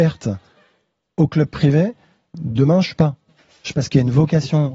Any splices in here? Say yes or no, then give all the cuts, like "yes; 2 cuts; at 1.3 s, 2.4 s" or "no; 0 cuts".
yes; 2 cuts; at 3.0 s, 3.7 s